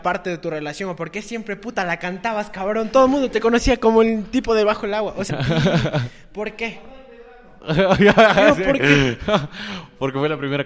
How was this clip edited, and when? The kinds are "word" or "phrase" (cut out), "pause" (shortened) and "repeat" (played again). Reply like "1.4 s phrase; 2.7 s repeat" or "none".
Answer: 5.3 s phrase